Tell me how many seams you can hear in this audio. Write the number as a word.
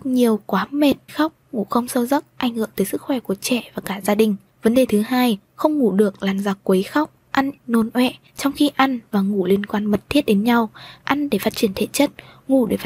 two